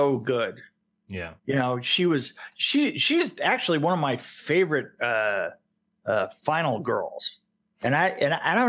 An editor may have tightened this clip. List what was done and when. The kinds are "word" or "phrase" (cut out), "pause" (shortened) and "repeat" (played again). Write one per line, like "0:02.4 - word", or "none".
0:01.4 - pause